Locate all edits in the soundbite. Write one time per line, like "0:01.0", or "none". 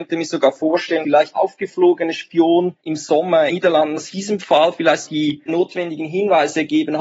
0:01.0
0:01.3
0:02.8
0:03.5
0:04.1
0:05.0